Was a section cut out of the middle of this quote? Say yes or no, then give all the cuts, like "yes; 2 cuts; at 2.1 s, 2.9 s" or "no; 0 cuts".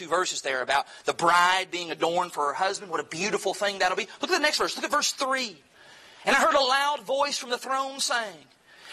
no; 0 cuts